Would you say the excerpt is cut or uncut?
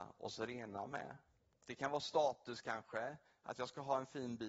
uncut